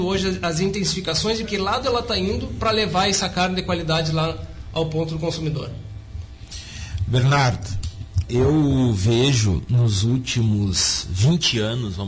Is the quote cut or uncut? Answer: cut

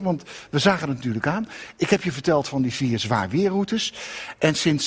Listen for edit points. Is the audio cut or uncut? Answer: uncut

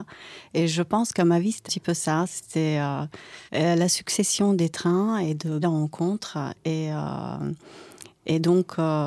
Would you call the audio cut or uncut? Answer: cut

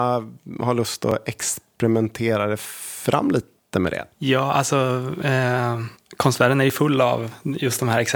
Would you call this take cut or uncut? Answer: cut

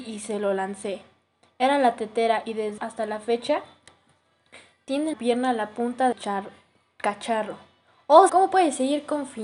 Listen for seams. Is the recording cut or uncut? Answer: cut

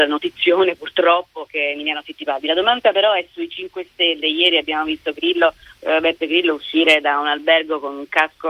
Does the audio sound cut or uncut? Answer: uncut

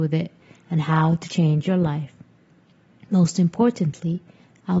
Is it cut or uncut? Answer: uncut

